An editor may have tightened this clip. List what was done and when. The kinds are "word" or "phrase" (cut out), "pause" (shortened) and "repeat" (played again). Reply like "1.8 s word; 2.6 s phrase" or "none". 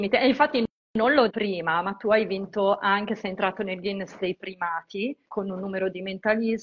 1.3 s word; 5.2 s pause